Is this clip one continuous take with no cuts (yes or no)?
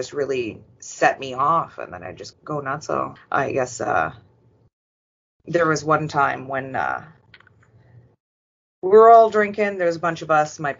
no